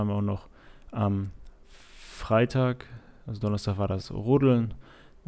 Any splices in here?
no; 0 cuts

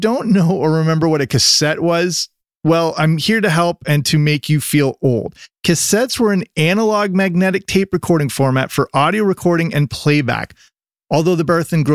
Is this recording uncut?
yes; 0 cuts

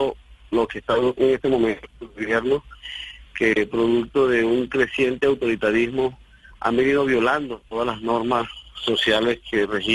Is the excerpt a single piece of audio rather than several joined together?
yes; 0 cuts

